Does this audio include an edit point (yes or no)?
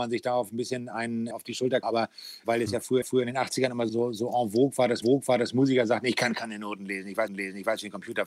yes